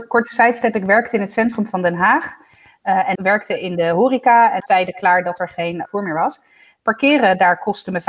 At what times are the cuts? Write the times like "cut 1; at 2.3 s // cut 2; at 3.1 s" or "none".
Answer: cut 1; at 3.2 s // cut 2; at 4.6 s // cut 3; at 5.8 s